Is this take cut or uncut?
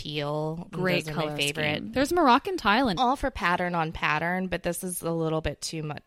cut